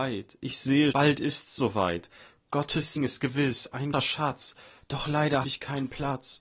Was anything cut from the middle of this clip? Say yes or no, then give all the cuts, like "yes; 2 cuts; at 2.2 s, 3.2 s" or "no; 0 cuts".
yes; 4 cuts; at 0.9 s, 3.0 s, 3.9 s, 5.4 s